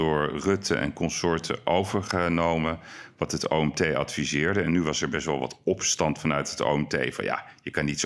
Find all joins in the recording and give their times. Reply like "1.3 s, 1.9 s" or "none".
none